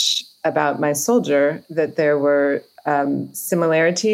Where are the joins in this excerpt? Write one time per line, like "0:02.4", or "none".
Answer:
0:01.6

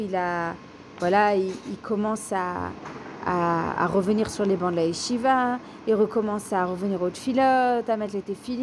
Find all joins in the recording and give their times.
none

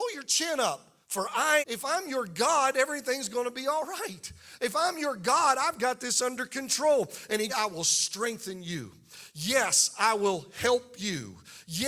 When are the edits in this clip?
0:01.0
0:01.6
0:07.5

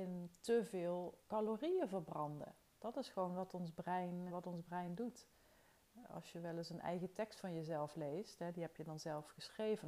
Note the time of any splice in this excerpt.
0:01.2
0:04.3

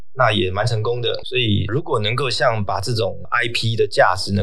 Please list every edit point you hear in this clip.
none

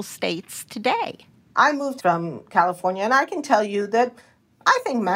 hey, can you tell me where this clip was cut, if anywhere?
0:02.0

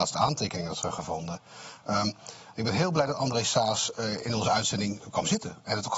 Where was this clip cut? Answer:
none

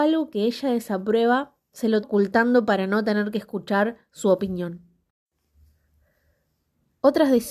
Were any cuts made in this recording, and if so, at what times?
0:02.0

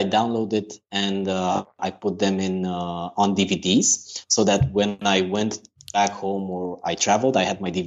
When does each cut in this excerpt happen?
none

